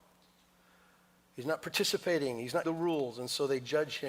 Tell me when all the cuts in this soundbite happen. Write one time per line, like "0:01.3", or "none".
0:02.6